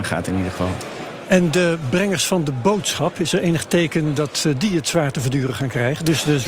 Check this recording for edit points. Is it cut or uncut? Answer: uncut